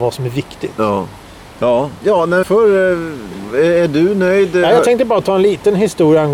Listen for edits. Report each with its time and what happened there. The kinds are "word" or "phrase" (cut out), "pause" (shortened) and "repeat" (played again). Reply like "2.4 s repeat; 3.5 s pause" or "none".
2.0 s word; 2.4 s word